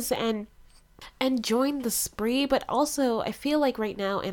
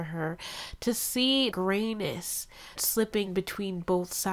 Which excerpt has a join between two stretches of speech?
second; 3 cuts; at 1.5 s, 2.8 s, 3.3 s

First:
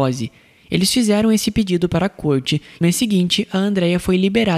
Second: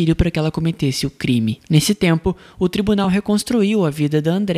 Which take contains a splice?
first; 1 cut; at 2.8 s

